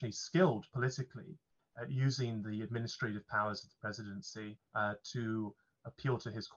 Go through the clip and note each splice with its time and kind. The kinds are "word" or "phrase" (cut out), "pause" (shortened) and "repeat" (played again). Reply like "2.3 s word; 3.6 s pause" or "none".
4.7 s pause